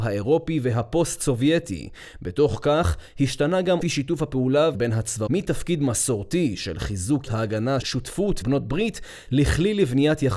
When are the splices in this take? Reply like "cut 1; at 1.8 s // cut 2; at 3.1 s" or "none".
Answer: cut 1; at 3.8 s // cut 2; at 4.7 s // cut 3; at 5.3 s // cut 4; at 7.3 s // cut 5; at 7.8 s // cut 6; at 8.4 s